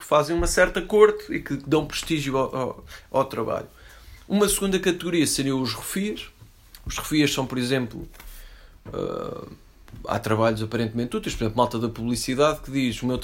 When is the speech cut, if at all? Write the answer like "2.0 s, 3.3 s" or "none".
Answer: none